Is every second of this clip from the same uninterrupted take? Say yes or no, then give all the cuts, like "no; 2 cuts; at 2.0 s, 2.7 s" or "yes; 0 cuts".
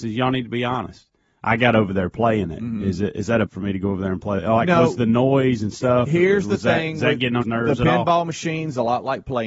no; 2 cuts; at 3.5 s, 7.4 s